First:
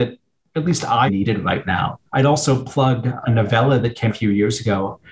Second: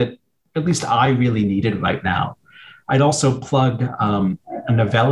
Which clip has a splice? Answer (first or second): first